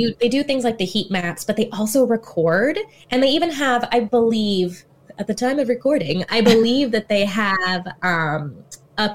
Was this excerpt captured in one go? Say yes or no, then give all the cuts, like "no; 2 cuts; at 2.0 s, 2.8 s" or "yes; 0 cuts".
yes; 0 cuts